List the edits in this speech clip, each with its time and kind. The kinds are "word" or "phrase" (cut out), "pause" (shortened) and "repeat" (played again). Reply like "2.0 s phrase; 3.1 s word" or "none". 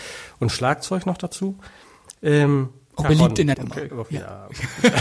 3.0 s word; 3.5 s word; 3.9 s word